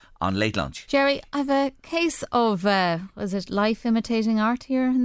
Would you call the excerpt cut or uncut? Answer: uncut